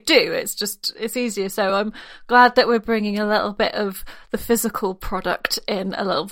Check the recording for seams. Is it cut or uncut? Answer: uncut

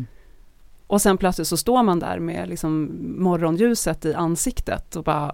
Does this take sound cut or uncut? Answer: uncut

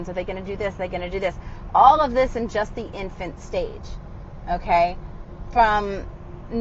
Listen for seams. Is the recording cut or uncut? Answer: uncut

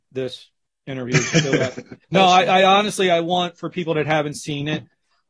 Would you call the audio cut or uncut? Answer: cut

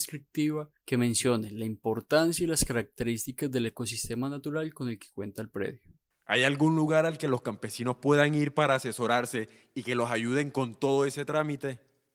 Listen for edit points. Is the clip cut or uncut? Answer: uncut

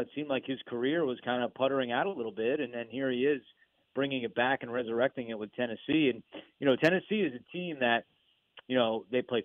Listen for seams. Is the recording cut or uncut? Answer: uncut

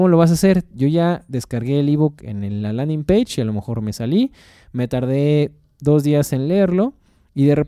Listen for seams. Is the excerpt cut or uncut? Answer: uncut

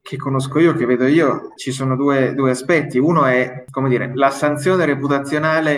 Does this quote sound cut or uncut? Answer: cut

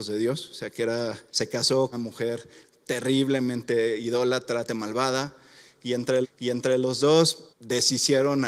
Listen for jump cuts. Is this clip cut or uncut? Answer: cut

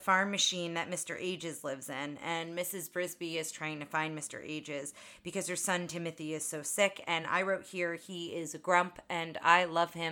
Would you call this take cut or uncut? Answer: uncut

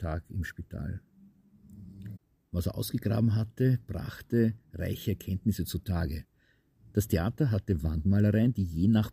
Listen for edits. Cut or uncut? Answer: uncut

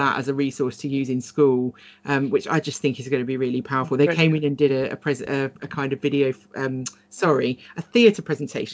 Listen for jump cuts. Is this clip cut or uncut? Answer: uncut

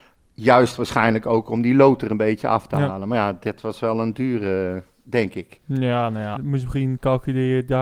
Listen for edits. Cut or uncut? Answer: cut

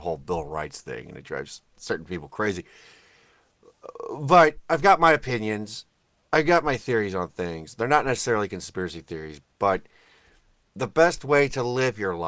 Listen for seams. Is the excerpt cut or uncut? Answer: uncut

